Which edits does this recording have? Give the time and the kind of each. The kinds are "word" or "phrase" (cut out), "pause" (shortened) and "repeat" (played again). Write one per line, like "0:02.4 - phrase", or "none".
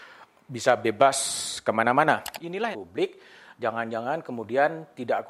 0:02.7 - phrase